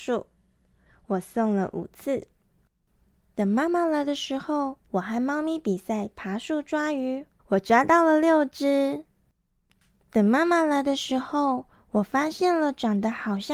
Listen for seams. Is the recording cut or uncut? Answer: cut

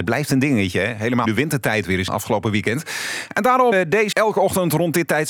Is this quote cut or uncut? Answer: cut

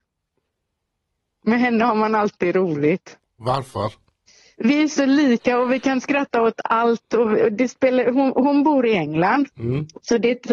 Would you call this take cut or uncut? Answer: cut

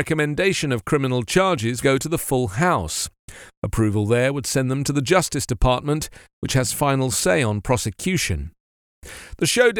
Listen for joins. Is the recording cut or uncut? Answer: cut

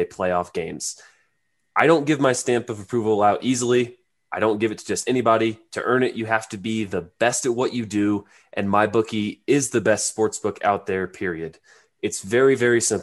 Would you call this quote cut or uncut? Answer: uncut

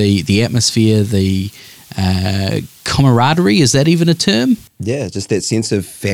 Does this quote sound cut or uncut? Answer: cut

